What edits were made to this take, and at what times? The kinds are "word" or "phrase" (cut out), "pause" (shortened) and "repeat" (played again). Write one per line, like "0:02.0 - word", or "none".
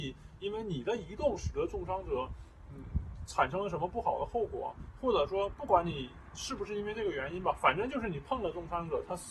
none